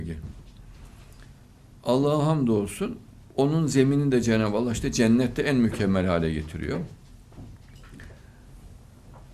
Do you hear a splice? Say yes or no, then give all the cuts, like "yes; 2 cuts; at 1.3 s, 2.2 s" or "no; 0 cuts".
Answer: no; 0 cuts